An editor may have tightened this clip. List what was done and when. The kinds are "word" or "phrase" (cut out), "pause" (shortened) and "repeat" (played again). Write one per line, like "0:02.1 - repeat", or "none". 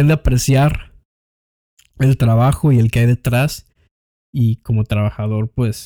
none